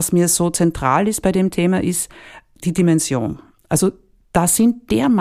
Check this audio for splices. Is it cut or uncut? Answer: uncut